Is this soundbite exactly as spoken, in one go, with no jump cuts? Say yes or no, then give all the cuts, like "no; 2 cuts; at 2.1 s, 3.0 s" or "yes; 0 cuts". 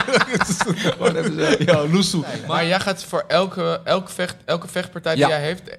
yes; 0 cuts